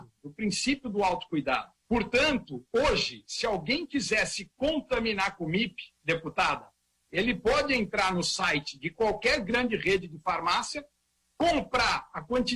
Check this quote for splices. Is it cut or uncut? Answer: cut